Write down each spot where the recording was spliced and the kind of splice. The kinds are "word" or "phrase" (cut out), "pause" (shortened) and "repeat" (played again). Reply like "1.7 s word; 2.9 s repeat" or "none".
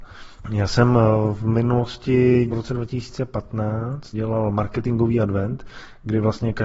2.5 s word; 4.1 s word